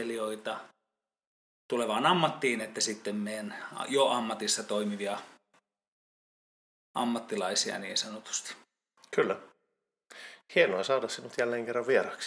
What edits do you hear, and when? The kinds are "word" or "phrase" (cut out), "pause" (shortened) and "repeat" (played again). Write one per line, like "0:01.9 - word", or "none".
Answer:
none